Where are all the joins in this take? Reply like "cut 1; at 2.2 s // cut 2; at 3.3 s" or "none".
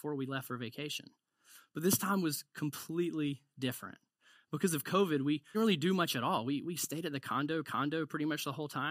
cut 1; at 5.5 s // cut 2; at 7.6 s